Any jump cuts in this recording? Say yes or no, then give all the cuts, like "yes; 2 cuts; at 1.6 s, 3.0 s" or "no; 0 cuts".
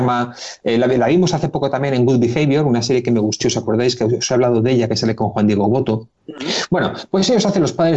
yes; 2 cuts; at 3.4 s, 6.2 s